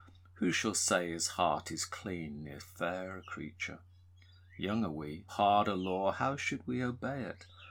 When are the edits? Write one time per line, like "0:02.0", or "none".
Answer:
0:02.6
0:05.3